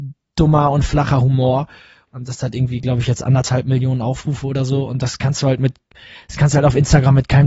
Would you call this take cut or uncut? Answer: uncut